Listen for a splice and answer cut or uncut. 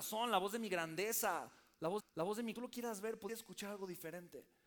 cut